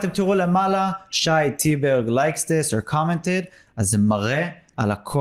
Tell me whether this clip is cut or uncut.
uncut